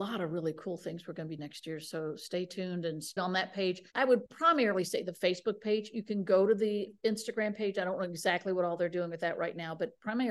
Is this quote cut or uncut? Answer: cut